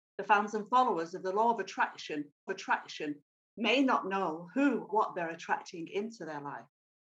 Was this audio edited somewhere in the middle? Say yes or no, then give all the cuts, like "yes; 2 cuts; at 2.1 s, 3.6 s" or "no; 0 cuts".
yes; 2 cuts; at 2.5 s, 4.9 s